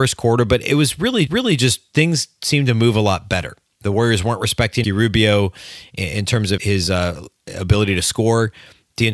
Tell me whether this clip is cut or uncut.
cut